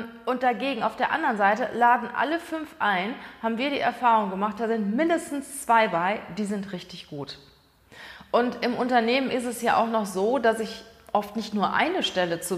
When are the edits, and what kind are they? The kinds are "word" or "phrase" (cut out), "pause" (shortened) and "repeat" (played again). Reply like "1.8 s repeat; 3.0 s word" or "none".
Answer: none